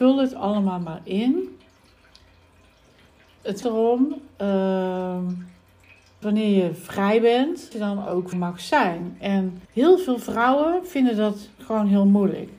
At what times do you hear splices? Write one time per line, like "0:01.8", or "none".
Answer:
0:03.6
0:06.2
0:07.7
0:08.3
0:09.6

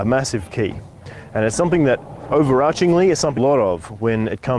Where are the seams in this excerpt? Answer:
0:02.3
0:03.4

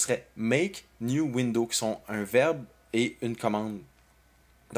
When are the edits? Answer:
none

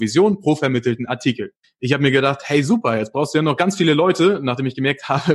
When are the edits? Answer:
0:01.6

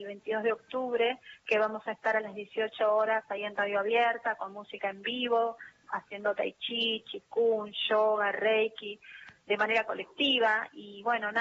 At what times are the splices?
none

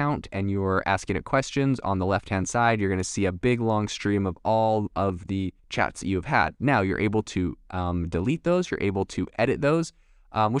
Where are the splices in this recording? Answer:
0:05.6

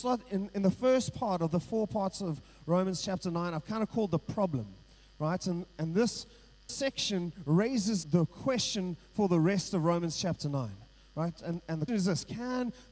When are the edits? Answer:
0:06.7
0:08.0
0:11.9

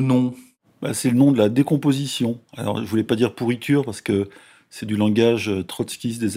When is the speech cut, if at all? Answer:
none

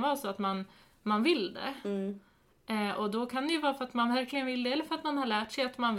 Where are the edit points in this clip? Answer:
none

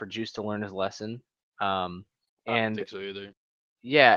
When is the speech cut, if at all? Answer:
0:02.3

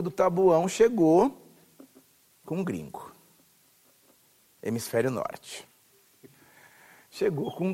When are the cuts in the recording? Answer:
none

